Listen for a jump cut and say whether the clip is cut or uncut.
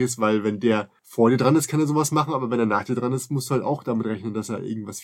cut